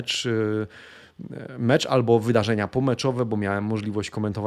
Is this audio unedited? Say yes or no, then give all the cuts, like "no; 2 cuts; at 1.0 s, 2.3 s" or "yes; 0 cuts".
yes; 0 cuts